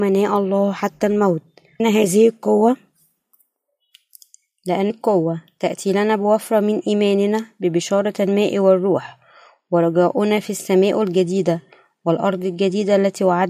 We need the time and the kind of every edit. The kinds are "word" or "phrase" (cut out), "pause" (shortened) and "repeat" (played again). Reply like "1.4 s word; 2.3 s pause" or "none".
1.8 s word; 4.9 s word